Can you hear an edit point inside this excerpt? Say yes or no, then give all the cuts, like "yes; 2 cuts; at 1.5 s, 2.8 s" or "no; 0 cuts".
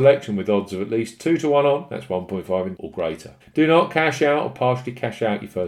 yes; 2 cuts; at 2.8 s, 3.4 s